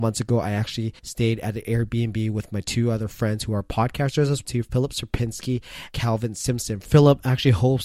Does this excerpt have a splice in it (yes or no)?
yes